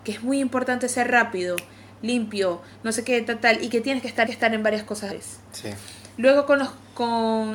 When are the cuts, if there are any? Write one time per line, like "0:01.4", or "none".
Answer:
0:04.3
0:05.1